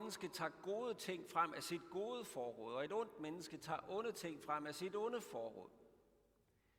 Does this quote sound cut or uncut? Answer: uncut